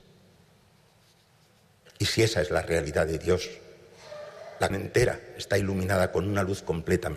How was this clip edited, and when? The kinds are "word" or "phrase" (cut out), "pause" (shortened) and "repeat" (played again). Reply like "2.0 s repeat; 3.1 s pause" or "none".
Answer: 4.7 s word